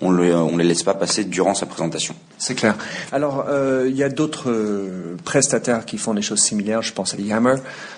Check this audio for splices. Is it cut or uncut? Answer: uncut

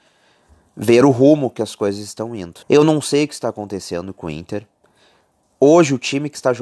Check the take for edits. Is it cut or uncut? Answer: cut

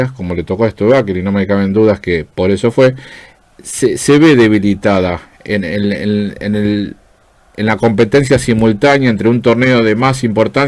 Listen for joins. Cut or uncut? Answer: uncut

